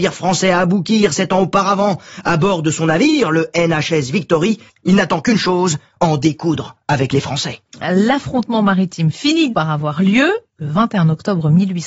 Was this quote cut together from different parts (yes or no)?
yes